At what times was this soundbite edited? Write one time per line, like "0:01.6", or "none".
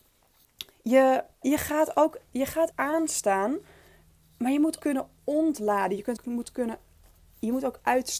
0:01.4
0:02.3
0:02.7
0:04.8
0:06.2